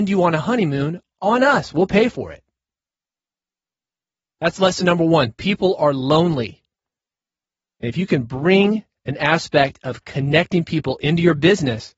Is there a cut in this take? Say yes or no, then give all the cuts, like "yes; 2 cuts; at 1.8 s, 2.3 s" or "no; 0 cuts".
no; 0 cuts